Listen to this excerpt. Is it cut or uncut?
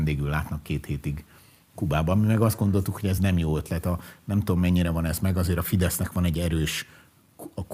uncut